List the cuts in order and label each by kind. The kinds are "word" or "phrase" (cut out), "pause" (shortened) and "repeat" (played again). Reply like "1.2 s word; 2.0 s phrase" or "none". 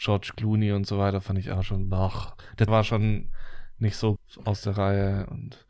2.7 s word; 4.2 s word